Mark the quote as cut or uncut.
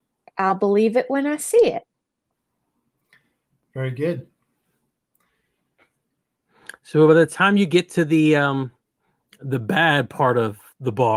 uncut